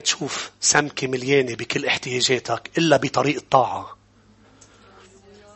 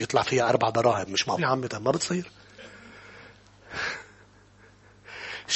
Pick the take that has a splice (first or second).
second